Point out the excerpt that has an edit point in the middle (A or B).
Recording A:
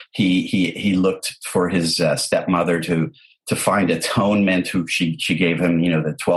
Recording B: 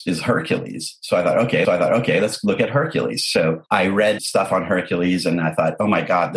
B